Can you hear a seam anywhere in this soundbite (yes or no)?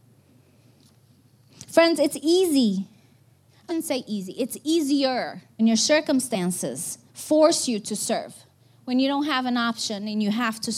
yes